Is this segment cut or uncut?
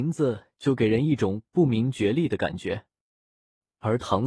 uncut